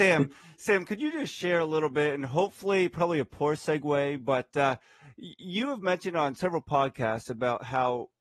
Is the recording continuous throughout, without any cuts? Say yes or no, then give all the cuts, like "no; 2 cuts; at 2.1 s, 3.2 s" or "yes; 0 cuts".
yes; 0 cuts